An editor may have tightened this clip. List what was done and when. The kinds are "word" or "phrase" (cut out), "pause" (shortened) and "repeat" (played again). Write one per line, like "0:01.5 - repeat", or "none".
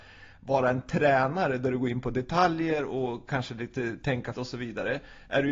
0:04.3 - word